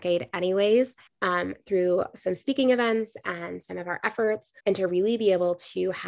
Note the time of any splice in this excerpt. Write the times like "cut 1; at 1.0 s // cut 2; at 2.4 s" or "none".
cut 1; at 1.1 s // cut 2; at 4.6 s